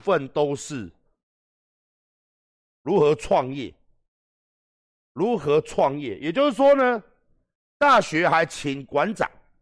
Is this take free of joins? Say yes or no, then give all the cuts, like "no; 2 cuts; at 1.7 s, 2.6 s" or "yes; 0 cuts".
yes; 0 cuts